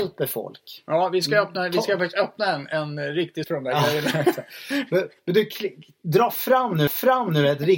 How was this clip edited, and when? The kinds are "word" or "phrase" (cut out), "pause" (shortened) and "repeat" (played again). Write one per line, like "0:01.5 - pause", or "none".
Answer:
0:03.4 - word
0:05.2 - pause
0:06.9 - repeat